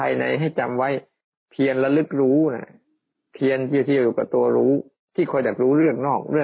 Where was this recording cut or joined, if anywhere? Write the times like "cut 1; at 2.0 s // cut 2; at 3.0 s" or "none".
none